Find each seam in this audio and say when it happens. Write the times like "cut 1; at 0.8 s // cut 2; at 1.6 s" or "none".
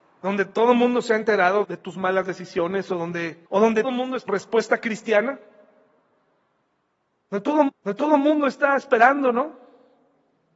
cut 1; at 1.6 s // cut 2; at 3.5 s // cut 3; at 3.8 s // cut 4; at 4.3 s // cut 5; at 7.7 s